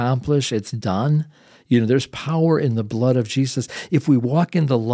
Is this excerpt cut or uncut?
uncut